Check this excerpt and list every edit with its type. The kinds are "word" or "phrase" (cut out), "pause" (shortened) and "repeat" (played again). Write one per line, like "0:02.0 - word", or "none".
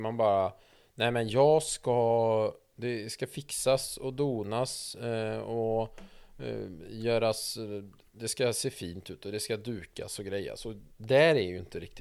none